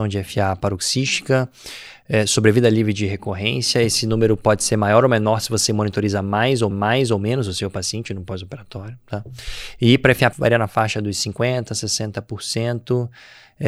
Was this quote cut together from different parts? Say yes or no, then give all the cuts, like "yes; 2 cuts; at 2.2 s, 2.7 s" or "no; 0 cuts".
yes; 2 cuts; at 6.7 s, 10.3 s